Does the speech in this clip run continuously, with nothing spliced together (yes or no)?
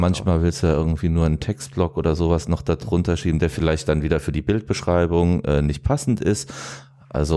yes